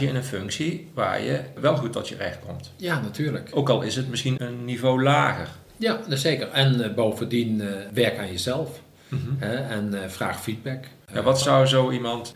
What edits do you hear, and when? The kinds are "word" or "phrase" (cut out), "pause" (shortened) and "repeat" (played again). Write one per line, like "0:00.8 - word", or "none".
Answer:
0:04.4 - word
0:11.0 - pause
0:11.4 - word